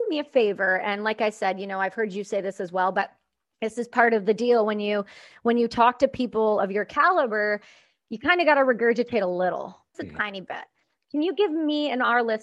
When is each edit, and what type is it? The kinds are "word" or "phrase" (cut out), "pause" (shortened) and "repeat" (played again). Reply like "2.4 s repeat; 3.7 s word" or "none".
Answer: 9.9 s word